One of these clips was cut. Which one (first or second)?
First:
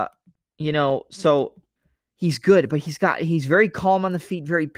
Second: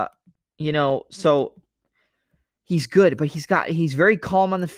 first